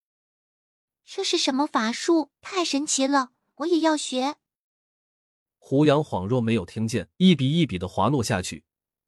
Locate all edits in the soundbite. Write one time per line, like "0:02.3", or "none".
0:02.4
0:07.1